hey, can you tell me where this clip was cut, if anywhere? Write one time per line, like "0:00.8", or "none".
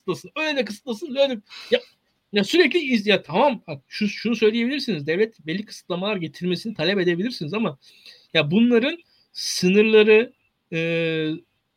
none